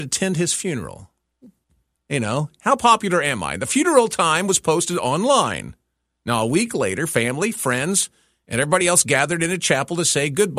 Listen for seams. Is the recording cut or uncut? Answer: uncut